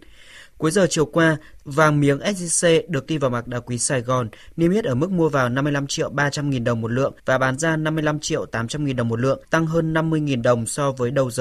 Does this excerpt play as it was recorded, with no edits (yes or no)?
no